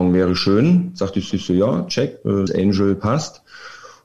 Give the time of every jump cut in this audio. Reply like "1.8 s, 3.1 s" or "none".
1.3 s, 2.5 s